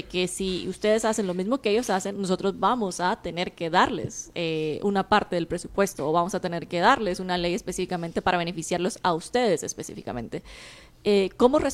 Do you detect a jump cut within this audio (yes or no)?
no